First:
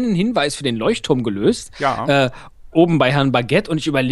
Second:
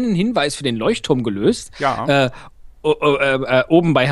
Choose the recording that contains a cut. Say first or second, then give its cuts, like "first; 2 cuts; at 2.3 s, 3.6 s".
first; 1 cut; at 2.7 s